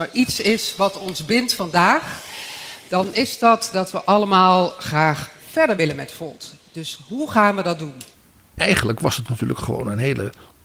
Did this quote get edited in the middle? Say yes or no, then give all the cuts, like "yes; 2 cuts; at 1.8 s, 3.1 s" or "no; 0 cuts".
no; 0 cuts